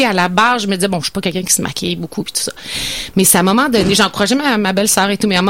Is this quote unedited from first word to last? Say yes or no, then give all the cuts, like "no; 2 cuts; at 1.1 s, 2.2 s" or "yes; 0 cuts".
yes; 0 cuts